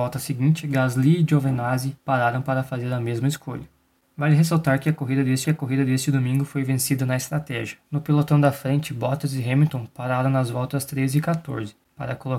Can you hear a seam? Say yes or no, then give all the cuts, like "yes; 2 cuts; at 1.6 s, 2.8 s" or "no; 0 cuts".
yes; 3 cuts; at 2.0 s, 5.4 s, 7.8 s